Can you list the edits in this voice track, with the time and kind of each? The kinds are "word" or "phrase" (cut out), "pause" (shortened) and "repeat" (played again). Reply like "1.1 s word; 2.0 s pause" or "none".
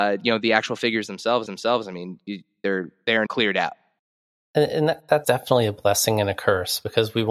1.5 s repeat; 3.3 s word; 4.0 s pause; 5.2 s word

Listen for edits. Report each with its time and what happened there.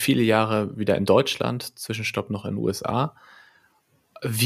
none

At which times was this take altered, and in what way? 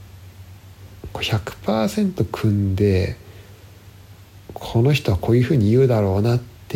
4.4 s pause

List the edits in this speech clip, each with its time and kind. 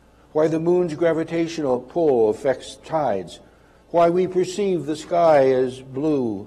none

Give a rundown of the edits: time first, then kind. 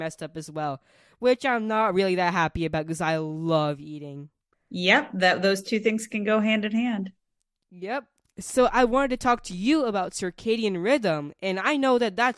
none

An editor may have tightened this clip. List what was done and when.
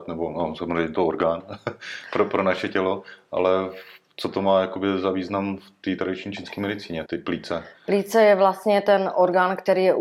7.1 s word

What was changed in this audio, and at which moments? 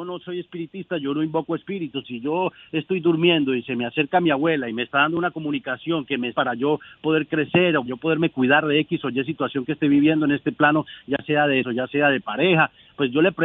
2.0 s word; 6.3 s word; 7.9 s word; 11.6 s word

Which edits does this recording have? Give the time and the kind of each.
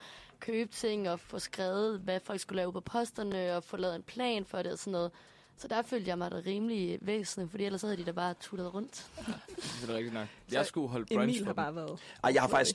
none

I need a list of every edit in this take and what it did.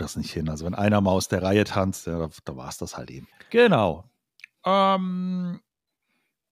3.3 s pause

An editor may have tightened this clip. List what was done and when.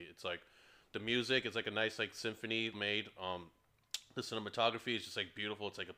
2.7 s phrase

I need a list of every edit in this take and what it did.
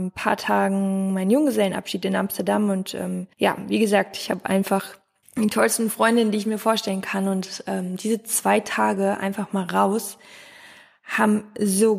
3.3 s pause; 5.2 s pause

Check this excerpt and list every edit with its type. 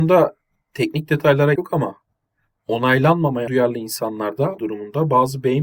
1.5 s phrase; 3.5 s word; 4.6 s word

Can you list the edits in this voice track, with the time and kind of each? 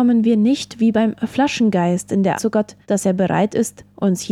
2.4 s word; 2.8 s pause

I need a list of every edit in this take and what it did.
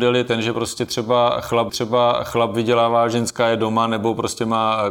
1.7 s repeat

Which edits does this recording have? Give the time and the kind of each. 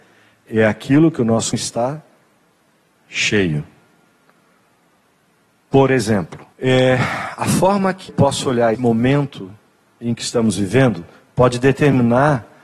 1.5 s word; 6.5 s pause; 8.1 s word; 8.7 s word

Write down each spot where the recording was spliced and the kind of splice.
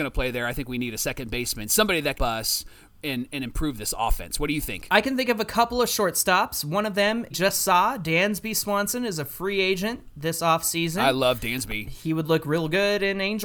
2.1 s phrase; 7.3 s word

